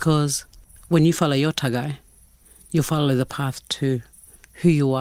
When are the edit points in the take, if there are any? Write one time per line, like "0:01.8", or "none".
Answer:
none

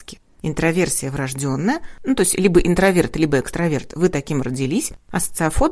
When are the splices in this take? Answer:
none

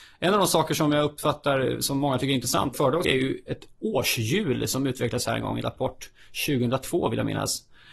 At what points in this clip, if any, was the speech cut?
0:02.7
0:03.0

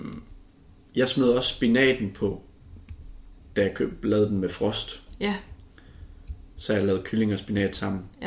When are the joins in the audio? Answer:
none

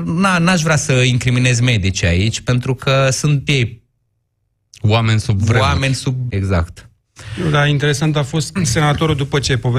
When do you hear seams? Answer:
0:03.5
0:06.3
0:08.6

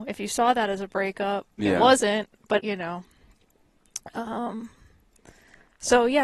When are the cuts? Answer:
0:01.6
0:02.6

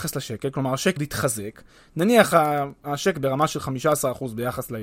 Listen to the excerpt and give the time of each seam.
0:01.0
0:03.1

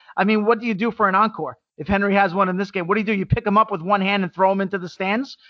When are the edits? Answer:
none

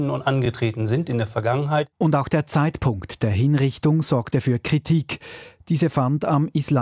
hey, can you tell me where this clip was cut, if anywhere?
none

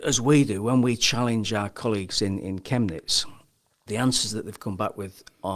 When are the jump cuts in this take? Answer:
0:03.9

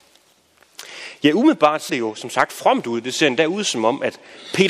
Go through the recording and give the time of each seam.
0:01.9

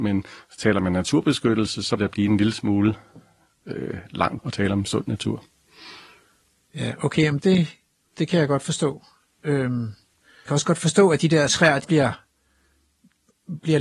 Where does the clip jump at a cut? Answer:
0:02.0
0:04.4
0:07.4
0:10.5
0:11.5
0:11.8

